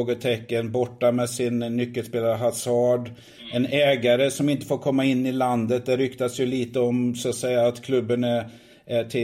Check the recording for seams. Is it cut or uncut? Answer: uncut